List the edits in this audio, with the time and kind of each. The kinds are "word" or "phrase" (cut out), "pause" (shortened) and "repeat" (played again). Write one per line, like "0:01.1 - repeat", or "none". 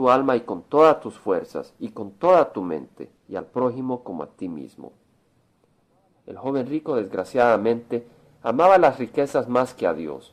0:03.2 - pause